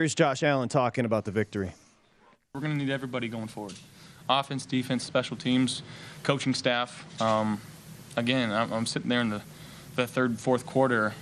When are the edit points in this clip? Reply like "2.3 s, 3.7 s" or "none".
none